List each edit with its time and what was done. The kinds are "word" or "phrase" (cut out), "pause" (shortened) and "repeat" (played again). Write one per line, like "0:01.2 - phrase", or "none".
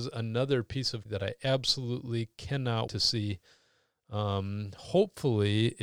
0:01.1 - word
0:02.9 - word